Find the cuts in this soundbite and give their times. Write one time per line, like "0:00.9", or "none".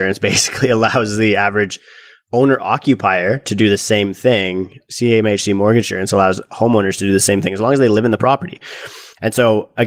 none